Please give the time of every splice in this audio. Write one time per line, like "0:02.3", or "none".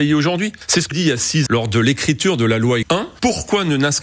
0:00.9
0:01.5
0:02.8